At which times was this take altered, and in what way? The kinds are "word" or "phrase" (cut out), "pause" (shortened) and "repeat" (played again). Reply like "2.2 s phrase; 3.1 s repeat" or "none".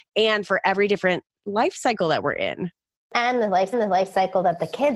3.7 s repeat